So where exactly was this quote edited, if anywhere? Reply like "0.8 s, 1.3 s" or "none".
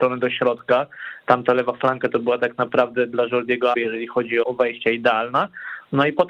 3.7 s, 4.4 s